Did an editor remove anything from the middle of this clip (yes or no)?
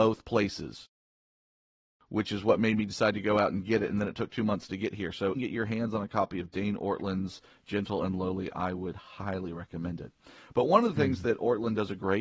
yes